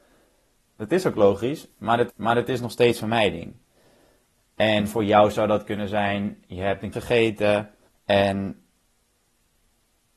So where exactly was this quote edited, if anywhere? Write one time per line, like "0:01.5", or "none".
0:02.1
0:06.9
0:07.9